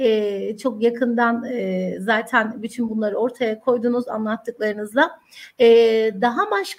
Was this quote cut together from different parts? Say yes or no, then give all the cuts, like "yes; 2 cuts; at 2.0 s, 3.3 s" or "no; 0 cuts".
no; 0 cuts